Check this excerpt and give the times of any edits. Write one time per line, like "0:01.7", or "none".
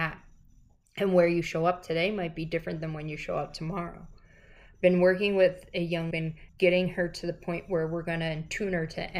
0:06.1
0:06.5